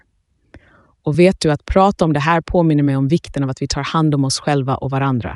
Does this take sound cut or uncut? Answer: uncut